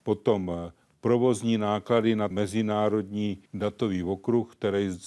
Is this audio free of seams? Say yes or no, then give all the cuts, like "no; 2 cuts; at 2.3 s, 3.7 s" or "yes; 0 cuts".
no; 2 cuts; at 2.3 s, 3.5 s